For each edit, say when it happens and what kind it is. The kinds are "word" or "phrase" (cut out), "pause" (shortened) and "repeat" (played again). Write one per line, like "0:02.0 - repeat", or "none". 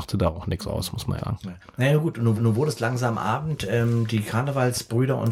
0:01.2 - word
0:02.4 - repeat